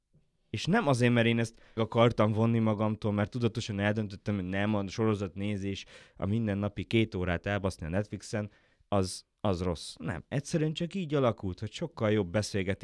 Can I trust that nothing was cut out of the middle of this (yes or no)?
no